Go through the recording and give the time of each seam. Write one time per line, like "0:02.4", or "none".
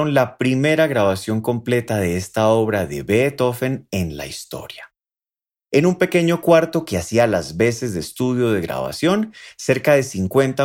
none